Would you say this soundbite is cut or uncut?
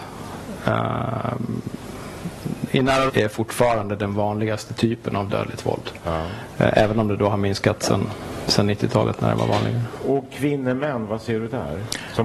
cut